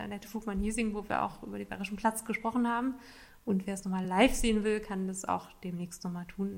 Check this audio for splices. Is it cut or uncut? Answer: uncut